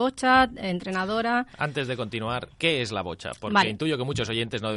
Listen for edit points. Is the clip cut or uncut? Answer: cut